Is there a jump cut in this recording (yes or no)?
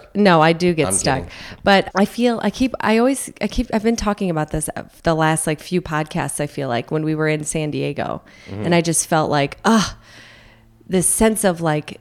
yes